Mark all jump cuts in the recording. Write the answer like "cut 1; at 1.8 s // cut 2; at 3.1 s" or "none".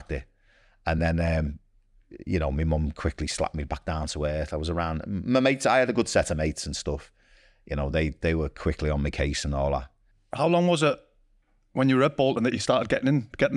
none